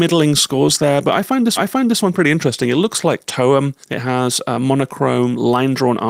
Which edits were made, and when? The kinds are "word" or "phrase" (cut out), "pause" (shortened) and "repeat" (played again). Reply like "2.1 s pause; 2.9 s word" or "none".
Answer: 1.6 s repeat; 3.8 s pause